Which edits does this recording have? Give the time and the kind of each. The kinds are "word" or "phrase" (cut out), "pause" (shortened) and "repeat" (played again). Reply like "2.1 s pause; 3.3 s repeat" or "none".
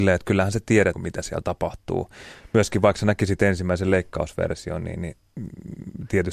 0.9 s word

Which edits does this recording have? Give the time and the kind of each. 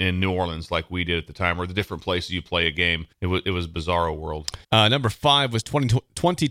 3.1 s pause; 4.6 s pause

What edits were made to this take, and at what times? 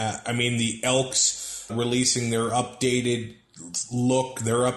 1.7 s word

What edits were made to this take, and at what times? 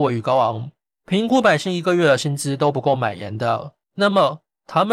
3.8 s pause

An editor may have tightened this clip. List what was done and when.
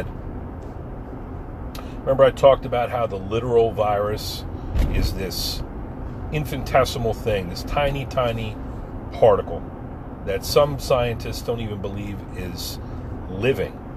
none

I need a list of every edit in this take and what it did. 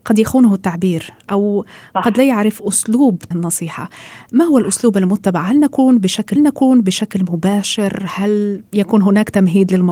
3.3 s phrase; 6.4 s repeat; 8.7 s pause

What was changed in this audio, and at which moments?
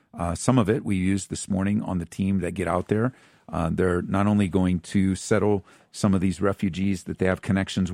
none

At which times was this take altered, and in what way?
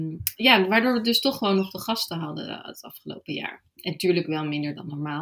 none

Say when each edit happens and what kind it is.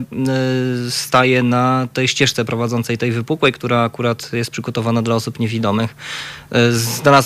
none

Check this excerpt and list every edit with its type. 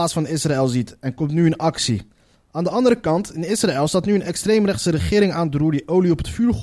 none

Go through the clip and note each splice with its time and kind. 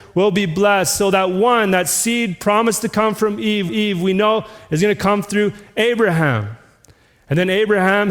3.7 s repeat

